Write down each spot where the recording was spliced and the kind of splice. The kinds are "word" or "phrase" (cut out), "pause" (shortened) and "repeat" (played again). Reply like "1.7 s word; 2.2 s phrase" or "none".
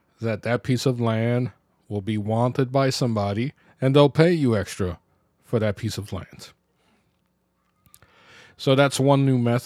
3.6 s pause